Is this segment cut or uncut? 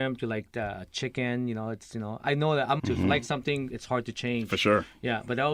cut